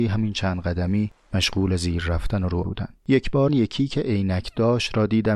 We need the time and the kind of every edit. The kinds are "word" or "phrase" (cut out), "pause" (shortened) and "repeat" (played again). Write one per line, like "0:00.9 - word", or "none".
0:02.6 - word
0:03.0 - pause
0:03.5 - word